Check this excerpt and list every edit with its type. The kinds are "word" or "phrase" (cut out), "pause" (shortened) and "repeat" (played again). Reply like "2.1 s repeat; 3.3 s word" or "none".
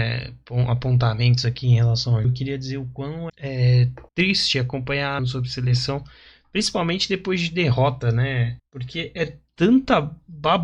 2.2 s word; 3.3 s word; 4.1 s pause; 5.2 s phrase; 8.6 s pause